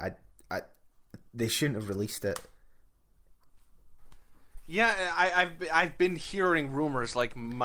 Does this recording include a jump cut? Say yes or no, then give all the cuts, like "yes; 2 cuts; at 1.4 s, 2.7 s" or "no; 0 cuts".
no; 0 cuts